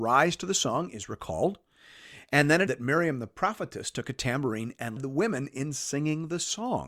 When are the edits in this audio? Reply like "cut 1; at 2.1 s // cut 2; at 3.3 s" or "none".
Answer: cut 1; at 2.7 s // cut 2; at 5.0 s